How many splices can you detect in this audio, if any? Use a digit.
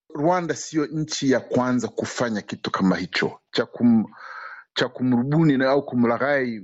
0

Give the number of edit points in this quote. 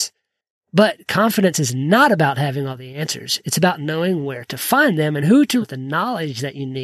1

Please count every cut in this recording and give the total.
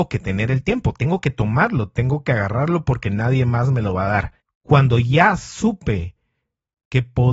1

